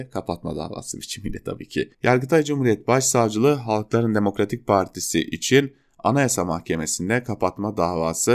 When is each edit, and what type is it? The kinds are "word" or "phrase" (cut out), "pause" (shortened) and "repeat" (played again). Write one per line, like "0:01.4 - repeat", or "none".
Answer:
0:01.9 - pause